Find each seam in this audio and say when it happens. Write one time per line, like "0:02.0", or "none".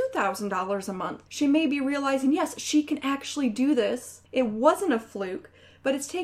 0:01.3
0:04.3